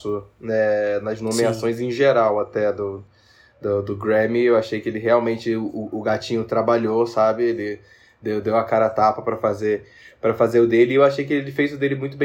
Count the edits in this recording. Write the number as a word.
zero